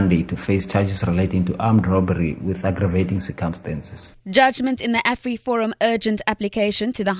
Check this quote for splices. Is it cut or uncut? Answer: cut